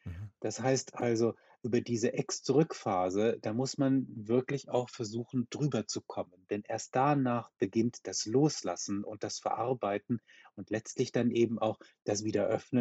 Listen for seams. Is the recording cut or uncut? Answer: uncut